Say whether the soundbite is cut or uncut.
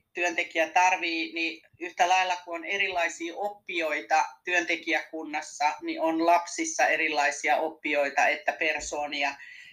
cut